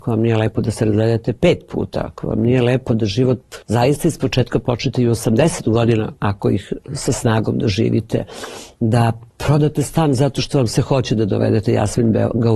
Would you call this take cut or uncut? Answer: cut